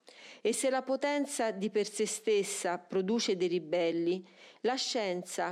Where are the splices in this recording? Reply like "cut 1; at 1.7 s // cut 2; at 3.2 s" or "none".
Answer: none

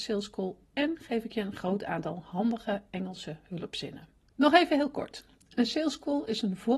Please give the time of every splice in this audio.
none

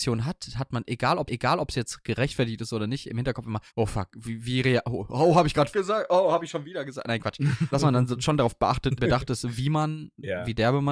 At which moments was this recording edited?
cut 1; at 1.3 s // cut 2; at 3.7 s // cut 3; at 5.7 s // cut 4; at 7.7 s // cut 5; at 9.0 s

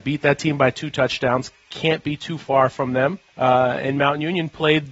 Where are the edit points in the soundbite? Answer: cut 1; at 3.3 s

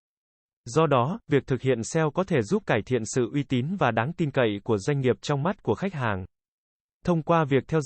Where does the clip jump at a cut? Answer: none

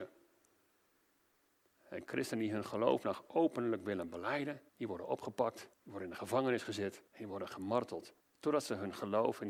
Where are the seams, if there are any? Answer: cut 1; at 4.7 s // cut 2; at 5.7 s // cut 3; at 7.1 s // cut 4; at 8.2 s

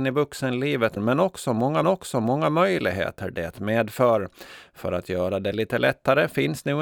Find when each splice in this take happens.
cut 1; at 1.0 s // cut 2; at 1.8 s

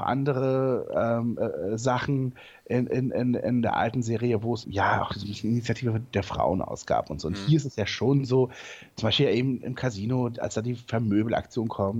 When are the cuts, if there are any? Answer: cut 1; at 4.6 s

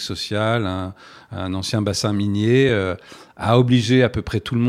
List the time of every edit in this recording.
none

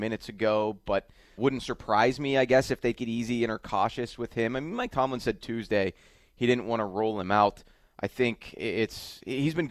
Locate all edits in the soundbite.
cut 1; at 1.4 s // cut 2; at 3.0 s

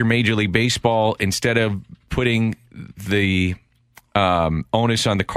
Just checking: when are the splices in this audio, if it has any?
none

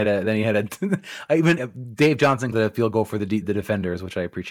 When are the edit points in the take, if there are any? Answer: cut 1; at 1.6 s // cut 2; at 2.5 s // cut 3; at 3.4 s

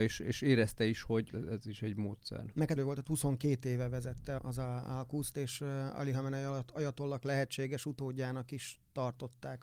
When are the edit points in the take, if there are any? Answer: cut 1; at 2.8 s // cut 2; at 4.4 s

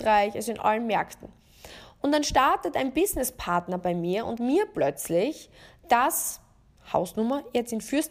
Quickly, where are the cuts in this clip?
cut 1; at 4.4 s

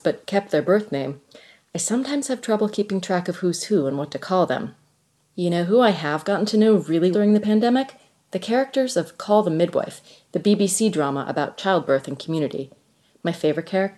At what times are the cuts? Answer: cut 1; at 7.1 s

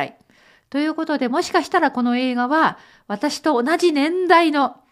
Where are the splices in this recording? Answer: none

